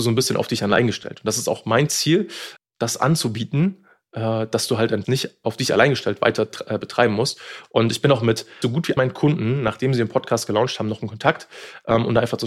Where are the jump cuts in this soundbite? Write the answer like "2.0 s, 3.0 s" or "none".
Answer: 2.6 s, 5.0 s, 8.6 s, 9.0 s